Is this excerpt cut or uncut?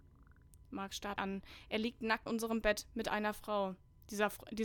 cut